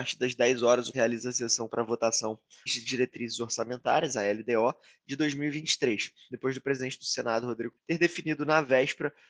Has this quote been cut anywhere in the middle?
yes; 4 cuts; at 0.9 s, 1.7 s, 2.7 s, 7.8 s

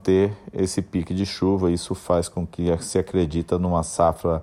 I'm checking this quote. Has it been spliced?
no; 0 cuts

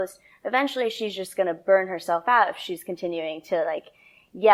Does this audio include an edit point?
no; 0 cuts

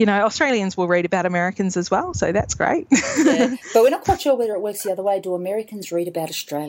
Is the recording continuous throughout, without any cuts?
yes; 0 cuts

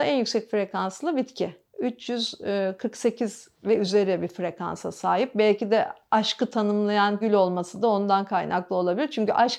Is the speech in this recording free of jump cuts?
no; 1 cut; at 7.2 s

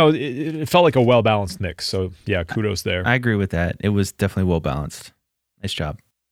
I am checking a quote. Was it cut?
no; 0 cuts

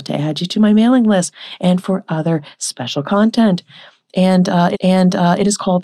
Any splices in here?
yes; 1 cut; at 4.7 s

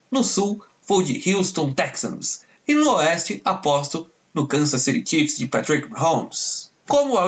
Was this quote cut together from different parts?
no; 0 cuts

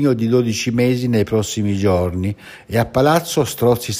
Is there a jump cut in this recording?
no; 0 cuts

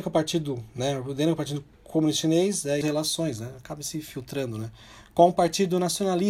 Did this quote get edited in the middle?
yes; 2 cuts; at 1.7 s, 2.8 s

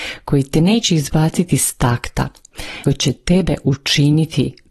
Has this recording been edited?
yes; 1 cut; at 2.8 s

